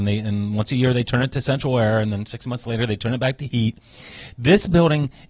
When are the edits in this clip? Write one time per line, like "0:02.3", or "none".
none